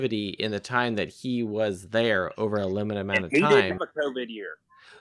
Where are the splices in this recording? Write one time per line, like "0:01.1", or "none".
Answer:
0:03.8